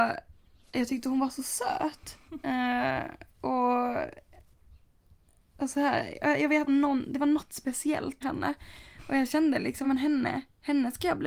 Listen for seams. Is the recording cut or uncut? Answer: cut